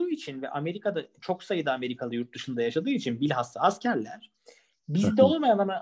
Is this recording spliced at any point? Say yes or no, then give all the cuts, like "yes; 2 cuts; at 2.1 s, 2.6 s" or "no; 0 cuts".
no; 0 cuts